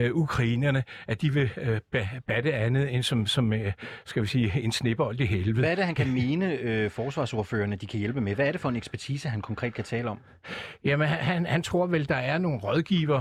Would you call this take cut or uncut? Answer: uncut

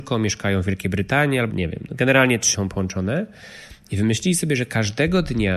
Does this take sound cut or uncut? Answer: cut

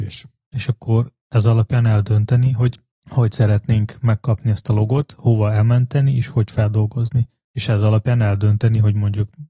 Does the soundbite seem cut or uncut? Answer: uncut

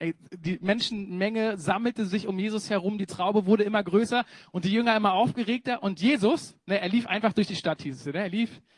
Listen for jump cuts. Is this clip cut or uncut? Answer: cut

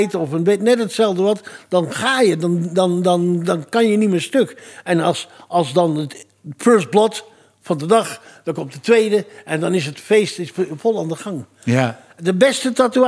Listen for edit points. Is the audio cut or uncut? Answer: uncut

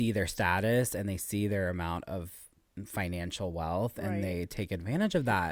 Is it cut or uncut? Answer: uncut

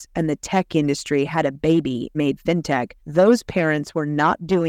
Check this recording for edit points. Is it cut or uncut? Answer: cut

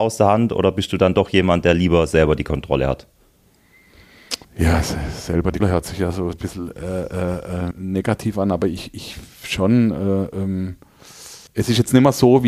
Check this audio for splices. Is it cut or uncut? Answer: cut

